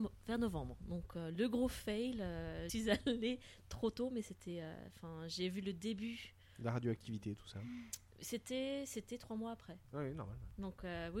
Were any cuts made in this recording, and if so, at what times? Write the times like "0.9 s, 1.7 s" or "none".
2.7 s, 9.8 s